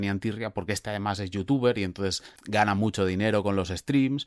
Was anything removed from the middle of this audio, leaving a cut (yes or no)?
yes